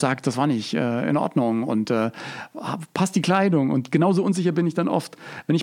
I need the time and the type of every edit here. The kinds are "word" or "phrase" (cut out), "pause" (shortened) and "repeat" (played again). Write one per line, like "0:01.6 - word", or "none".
none